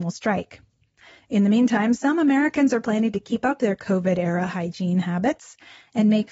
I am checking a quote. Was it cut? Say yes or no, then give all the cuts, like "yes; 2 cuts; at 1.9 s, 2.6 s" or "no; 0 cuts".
no; 0 cuts